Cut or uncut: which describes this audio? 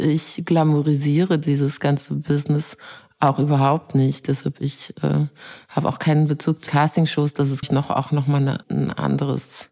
cut